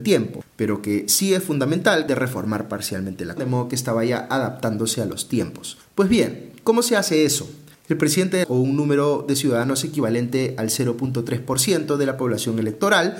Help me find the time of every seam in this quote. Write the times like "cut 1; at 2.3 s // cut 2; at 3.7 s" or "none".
cut 1; at 2.1 s // cut 2; at 3.4 s // cut 3; at 7.7 s // cut 4; at 8.4 s